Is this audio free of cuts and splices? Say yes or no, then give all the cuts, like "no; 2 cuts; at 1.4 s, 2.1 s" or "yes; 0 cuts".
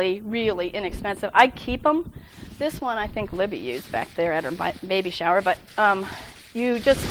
yes; 0 cuts